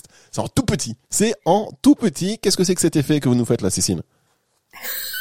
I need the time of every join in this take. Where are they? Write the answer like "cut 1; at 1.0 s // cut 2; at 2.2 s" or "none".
cut 1; at 1.0 s